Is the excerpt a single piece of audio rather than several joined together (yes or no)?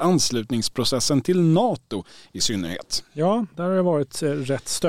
yes